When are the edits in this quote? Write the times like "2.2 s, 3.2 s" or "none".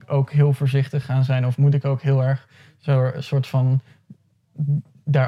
none